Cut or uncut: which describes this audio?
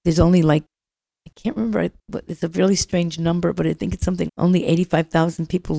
cut